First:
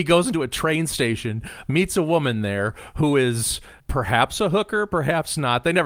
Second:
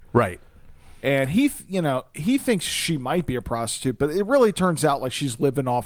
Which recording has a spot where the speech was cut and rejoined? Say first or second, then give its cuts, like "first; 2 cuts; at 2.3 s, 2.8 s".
first; 1 cut; at 3.8 s